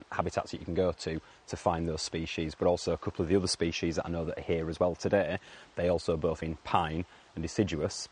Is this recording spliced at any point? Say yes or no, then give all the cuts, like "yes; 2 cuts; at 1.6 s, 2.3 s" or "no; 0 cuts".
yes; 1 cut; at 6.4 s